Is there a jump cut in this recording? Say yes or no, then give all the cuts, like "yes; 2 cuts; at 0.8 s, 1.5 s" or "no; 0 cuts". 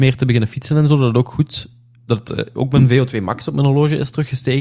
no; 0 cuts